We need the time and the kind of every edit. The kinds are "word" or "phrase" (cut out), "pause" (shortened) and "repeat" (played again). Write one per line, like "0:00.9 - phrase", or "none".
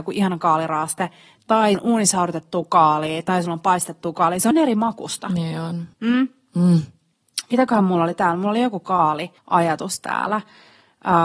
0:01.7 - word
0:04.5 - word
0:05.9 - pause
0:09.4 - pause

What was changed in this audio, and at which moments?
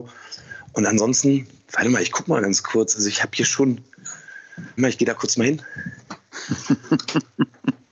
0:04.8 - word

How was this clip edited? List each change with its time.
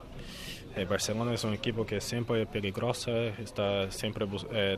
none

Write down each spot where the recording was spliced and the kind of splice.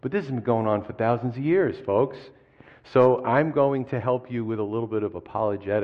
none

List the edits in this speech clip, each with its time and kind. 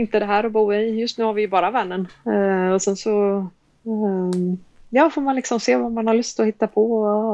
none

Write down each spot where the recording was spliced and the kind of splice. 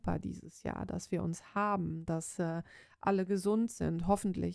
none

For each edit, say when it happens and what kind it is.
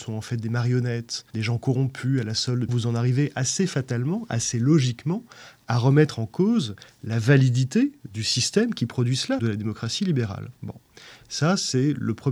0:01.3 - pause
0:02.7 - phrase
0:09.4 - word

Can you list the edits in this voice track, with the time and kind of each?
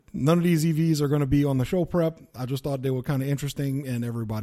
none

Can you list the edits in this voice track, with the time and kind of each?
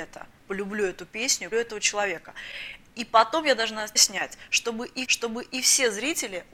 0:01.5 - word
0:04.0 - word
0:05.0 - repeat

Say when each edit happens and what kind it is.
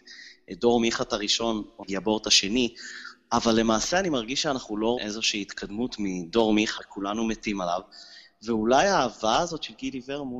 0:01.8 - word
0:05.0 - word
0:06.8 - word

